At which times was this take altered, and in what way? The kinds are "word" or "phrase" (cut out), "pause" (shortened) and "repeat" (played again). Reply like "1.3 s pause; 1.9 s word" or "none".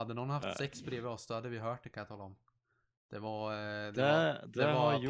none